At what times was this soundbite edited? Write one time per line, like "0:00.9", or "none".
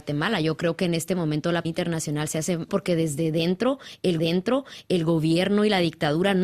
0:01.6
0:02.7
0:04.2